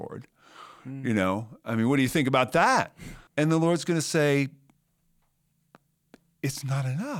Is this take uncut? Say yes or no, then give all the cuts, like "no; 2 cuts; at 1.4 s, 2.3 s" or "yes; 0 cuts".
no; 1 cut; at 3.3 s